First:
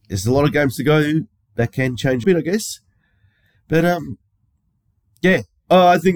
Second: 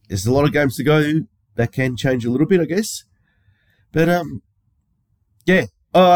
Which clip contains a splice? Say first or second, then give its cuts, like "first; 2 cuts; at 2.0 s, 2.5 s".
first; 1 cut; at 2.2 s